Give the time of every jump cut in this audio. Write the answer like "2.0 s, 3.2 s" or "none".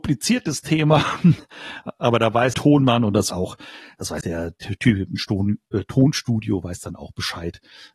2.5 s, 3.3 s, 4.2 s